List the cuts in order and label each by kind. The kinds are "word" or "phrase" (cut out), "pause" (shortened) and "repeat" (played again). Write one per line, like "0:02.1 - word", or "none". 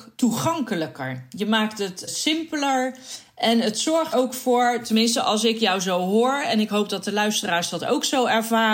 0:02.1 - word
0:04.1 - word